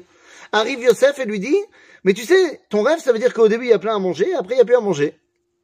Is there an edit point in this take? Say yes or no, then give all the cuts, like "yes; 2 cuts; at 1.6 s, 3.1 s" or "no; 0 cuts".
no; 0 cuts